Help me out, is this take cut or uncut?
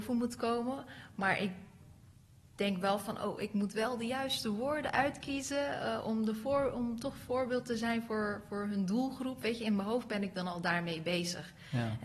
uncut